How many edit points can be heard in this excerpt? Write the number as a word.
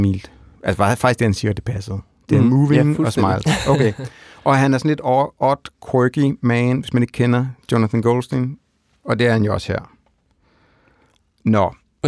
zero